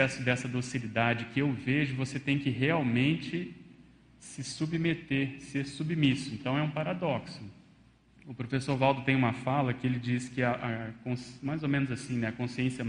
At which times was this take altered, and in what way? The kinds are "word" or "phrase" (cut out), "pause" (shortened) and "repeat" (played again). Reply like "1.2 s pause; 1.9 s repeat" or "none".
none